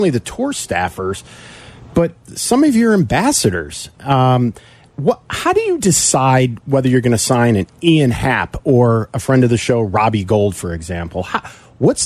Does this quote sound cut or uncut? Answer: uncut